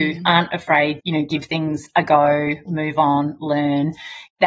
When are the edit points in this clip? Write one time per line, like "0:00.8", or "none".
0:01.0
0:02.7